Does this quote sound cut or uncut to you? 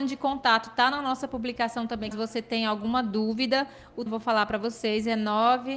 cut